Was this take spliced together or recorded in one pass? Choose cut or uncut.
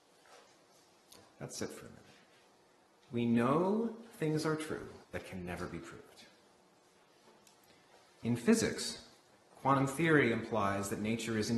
cut